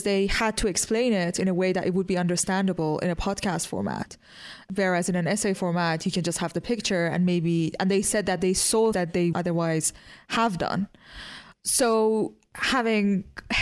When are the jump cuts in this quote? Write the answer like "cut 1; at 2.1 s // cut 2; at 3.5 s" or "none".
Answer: cut 1; at 8.9 s // cut 2; at 9.3 s